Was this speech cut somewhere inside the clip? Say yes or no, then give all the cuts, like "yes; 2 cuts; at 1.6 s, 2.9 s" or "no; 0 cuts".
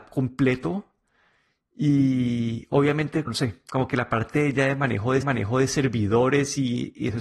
yes; 2 cuts; at 3.3 s, 5.2 s